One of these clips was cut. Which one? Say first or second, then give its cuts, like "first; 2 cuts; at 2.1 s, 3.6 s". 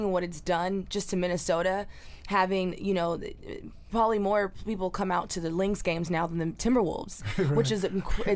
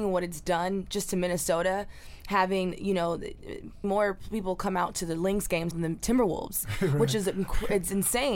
second; 2 cuts; at 3.8 s, 5.7 s